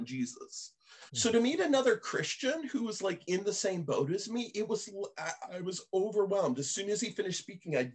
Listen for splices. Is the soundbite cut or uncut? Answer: cut